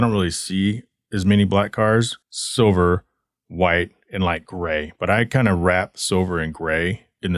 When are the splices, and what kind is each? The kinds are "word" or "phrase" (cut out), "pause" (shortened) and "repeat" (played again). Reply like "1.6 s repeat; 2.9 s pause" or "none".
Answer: 2.2 s pause